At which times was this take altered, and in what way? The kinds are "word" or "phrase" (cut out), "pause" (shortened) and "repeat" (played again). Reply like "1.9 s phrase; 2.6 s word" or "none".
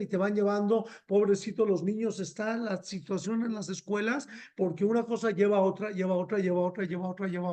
none